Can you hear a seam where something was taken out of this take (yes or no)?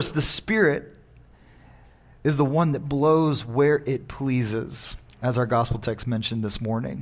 yes